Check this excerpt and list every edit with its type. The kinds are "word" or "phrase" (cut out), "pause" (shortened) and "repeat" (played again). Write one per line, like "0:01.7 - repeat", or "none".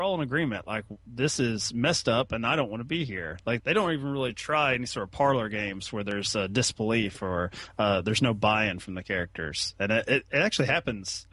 0:03.6 - word